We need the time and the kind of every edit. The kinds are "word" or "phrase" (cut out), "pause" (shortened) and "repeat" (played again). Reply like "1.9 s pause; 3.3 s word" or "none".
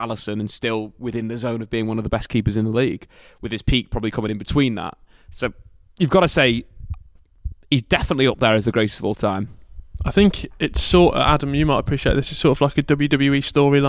none